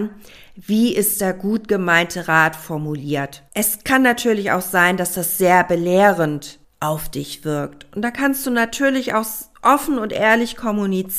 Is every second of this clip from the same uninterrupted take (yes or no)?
no